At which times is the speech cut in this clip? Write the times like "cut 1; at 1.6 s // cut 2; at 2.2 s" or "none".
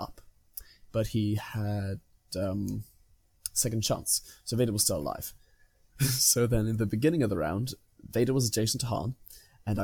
none